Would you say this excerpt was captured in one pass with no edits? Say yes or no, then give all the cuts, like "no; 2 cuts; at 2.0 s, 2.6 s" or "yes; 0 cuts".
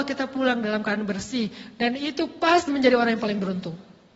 no; 1 cut; at 2.7 s